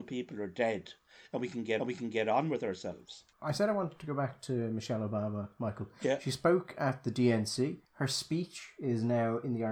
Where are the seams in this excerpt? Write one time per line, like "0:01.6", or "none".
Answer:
0:01.8
0:03.3
0:07.8

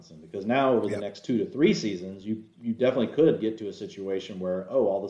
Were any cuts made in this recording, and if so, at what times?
none

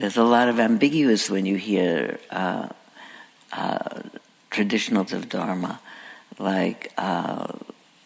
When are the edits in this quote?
0:01.3
0:05.1

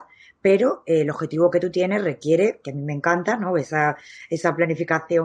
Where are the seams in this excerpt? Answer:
none

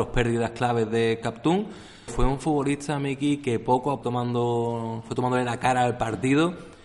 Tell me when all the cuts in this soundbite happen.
0:02.1
0:04.0

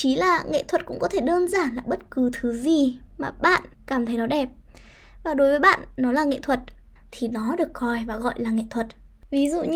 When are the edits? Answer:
0:03.7
0:07.0

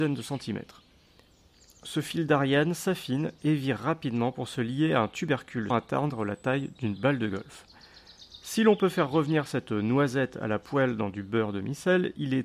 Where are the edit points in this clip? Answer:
0:05.7

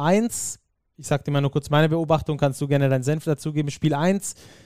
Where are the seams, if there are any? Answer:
none

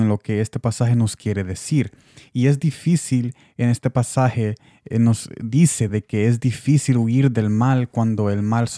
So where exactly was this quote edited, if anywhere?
none

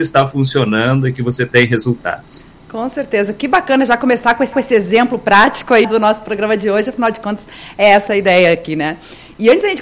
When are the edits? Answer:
0:04.5
0:05.8
0:08.1

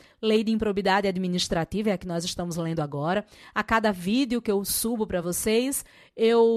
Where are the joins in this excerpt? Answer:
none

